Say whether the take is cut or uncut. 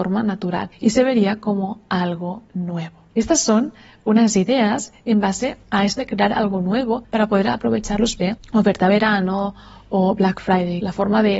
cut